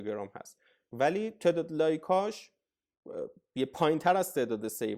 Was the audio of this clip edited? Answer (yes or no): no